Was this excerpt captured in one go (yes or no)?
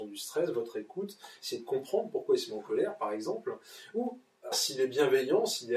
no